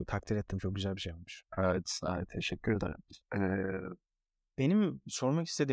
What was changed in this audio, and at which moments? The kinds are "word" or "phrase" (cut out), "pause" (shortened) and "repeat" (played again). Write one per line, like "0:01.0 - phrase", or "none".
0:01.5 - pause
0:03.2 - pause